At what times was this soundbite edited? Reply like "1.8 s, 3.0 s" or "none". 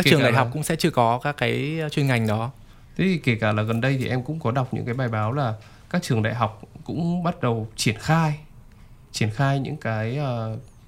none